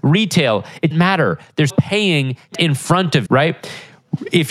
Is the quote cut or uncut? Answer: cut